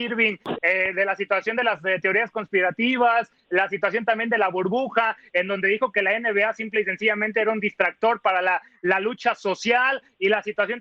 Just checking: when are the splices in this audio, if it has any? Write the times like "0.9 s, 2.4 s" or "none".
none